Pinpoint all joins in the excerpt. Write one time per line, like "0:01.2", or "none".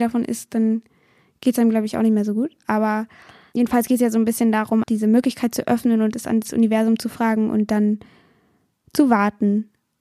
0:04.8